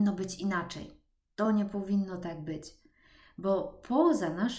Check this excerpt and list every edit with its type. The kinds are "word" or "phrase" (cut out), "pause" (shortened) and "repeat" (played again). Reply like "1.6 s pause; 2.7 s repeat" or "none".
none